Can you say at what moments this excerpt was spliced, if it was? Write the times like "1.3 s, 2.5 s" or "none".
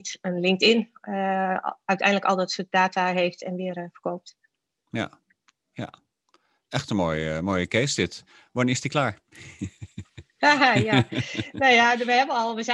none